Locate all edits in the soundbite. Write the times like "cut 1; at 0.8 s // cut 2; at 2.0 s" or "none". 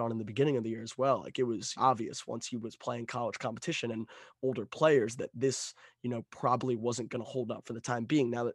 cut 1; at 1.7 s